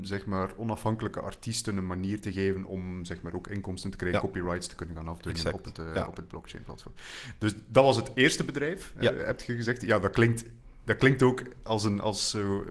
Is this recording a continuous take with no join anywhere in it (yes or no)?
yes